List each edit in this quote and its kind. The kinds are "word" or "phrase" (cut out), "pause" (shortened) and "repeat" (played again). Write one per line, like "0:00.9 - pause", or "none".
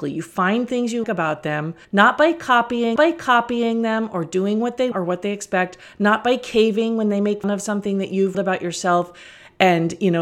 0:01.0 - word
0:01.8 - pause
0:03.0 - repeat
0:04.9 - word
0:07.4 - word
0:08.3 - word